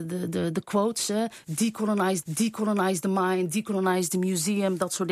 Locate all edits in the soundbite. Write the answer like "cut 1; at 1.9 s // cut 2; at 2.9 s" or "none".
cut 1; at 2.2 s